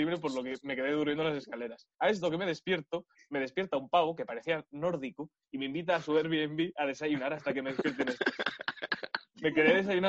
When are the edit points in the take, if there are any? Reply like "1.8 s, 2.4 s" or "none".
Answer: 1.9 s